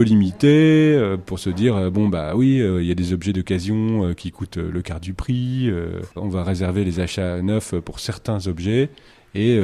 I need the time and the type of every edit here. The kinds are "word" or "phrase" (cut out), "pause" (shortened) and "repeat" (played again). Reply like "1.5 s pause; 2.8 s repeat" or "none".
6.1 s pause